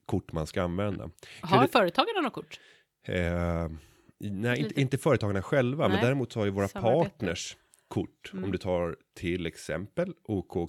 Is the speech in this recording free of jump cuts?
yes; 0 cuts

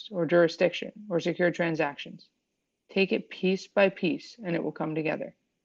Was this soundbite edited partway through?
no; 0 cuts

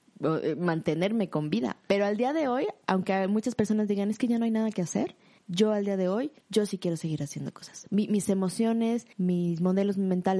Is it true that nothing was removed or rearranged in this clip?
no; 4 cuts; at 2.8 s, 5.4 s, 6.4 s, 9.1 s

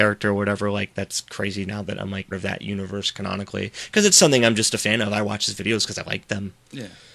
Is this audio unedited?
no; 1 cut; at 2.3 s

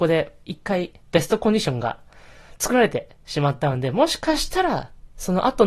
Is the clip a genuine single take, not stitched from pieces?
no; 1 cut; at 1.0 s

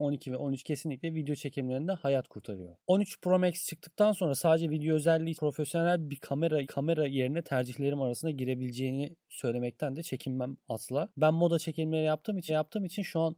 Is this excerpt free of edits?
no; 3 cuts; at 5.3 s, 6.6 s, 12.5 s

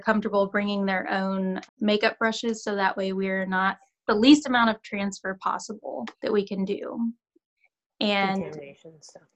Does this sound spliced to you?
yes; 3 cuts; at 1.7 s, 4.1 s, 6.1 s

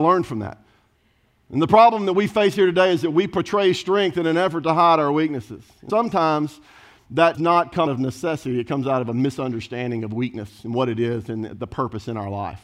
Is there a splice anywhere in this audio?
yes; 3 cuts; at 5.9 s, 7.3 s, 7.9 s

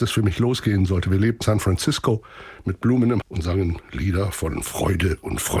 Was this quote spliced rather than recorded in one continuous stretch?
yes; 2 cuts; at 1.4 s, 3.2 s

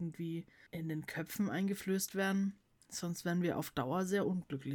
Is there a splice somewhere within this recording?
no; 0 cuts

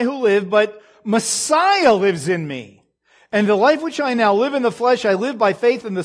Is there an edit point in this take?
no; 0 cuts

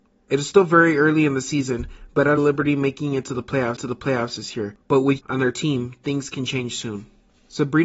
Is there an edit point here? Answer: yes; 4 cuts; at 2.4 s, 3.8 s, 4.8 s, 5.2 s

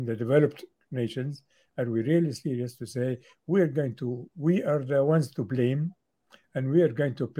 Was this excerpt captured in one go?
yes; 0 cuts

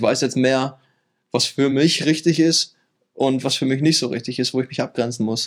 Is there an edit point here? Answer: no; 0 cuts

